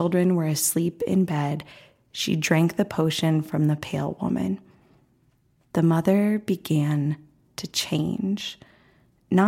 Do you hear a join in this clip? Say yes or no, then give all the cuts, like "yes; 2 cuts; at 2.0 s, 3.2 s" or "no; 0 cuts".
no; 0 cuts